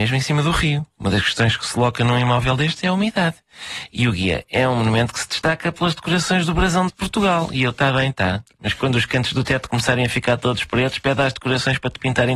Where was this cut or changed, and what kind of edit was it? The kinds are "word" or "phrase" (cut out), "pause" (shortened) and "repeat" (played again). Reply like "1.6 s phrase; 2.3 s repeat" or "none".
6.9 s phrase